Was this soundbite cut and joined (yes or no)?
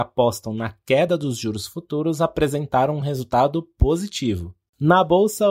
no